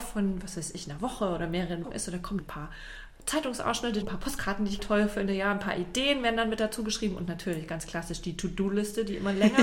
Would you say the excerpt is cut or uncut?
cut